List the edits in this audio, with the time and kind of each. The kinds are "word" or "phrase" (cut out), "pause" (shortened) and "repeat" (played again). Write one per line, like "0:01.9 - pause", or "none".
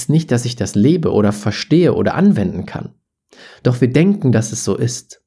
none

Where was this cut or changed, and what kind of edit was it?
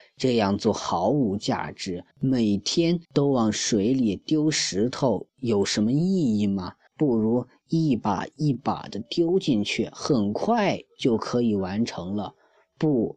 0:02.1 - pause
0:03.0 - pause
0:06.9 - pause

